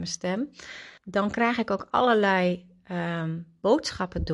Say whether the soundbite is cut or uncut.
cut